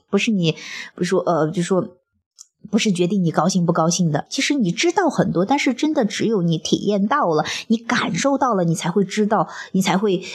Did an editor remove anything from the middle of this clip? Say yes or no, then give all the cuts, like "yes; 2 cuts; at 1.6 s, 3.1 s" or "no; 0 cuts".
no; 0 cuts